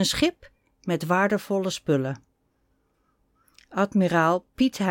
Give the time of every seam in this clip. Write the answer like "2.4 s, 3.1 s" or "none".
none